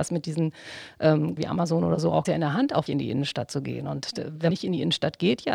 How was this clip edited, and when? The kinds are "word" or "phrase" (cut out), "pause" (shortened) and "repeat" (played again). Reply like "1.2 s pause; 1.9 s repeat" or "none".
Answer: 1.4 s phrase; 2.2 s phrase; 2.9 s word; 4.5 s word

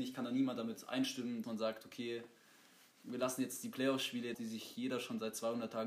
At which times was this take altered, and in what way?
1.4 s word; 4.3 s word

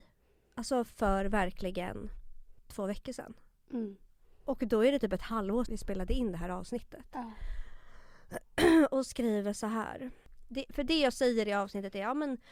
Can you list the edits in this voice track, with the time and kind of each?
5.7 s word

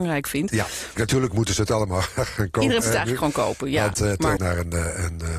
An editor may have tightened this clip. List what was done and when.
1.0 s word; 2.8 s word; 4.4 s phrase

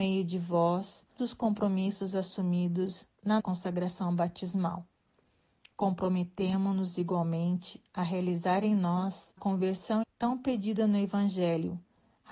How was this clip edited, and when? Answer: 1.2 s word; 3.4 s word; 9.4 s word; 10.0 s word

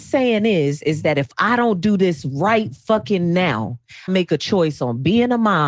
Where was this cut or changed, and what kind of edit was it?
4.1 s phrase

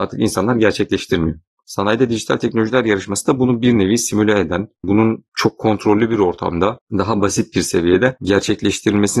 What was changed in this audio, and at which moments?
none

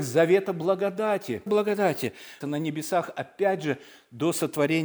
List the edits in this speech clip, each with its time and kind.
1.5 s word; 2.4 s phrase

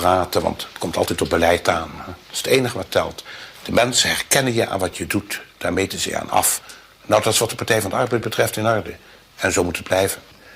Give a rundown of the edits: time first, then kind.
none

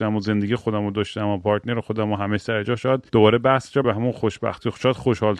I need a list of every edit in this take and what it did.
3.1 s pause; 3.8 s word

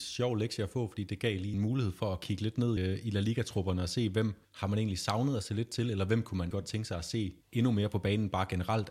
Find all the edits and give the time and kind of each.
1.5 s word; 2.8 s word; 4.4 s pause; 6.5 s word; 7.4 s pause

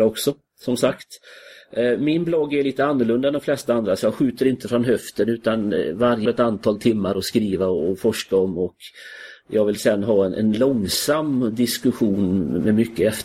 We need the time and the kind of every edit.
6.3 s phrase

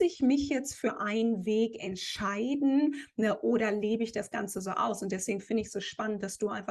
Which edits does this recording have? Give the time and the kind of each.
none

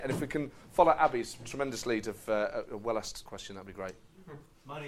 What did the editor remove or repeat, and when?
3.3 s word

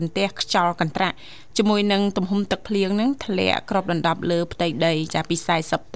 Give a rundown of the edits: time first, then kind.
none

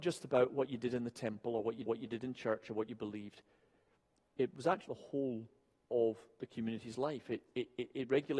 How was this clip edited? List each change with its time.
1.9 s repeat; 4.9 s word

